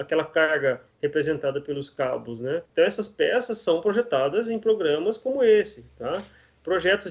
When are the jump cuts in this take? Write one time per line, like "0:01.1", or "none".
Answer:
0:02.7